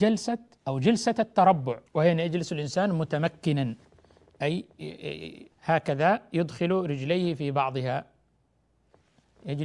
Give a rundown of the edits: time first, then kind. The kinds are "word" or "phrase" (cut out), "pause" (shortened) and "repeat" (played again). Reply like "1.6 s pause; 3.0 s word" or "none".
1.9 s pause; 5.5 s pause